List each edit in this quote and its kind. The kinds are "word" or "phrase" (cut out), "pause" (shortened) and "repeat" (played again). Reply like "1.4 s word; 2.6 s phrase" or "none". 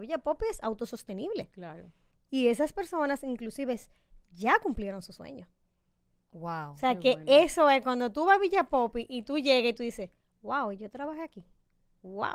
none